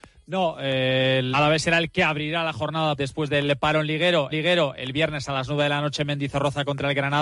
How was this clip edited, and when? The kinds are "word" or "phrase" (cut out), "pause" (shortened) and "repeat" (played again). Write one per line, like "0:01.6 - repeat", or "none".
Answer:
0:01.3 - word
0:03.0 - word
0:04.3 - repeat